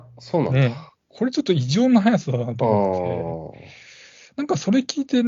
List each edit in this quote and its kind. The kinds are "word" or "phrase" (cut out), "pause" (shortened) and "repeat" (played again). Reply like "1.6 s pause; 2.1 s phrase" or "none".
none